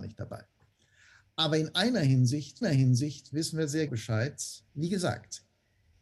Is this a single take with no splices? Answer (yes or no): no